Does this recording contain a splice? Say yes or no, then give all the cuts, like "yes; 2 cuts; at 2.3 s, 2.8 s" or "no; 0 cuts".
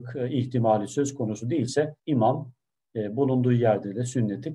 yes; 1 cut; at 2.0 s